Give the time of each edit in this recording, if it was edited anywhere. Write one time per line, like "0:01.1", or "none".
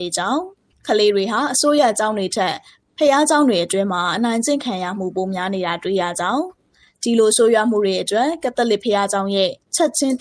none